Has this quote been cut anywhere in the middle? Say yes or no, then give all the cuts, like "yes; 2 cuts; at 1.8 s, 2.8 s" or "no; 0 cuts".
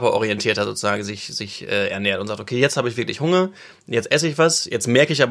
no; 0 cuts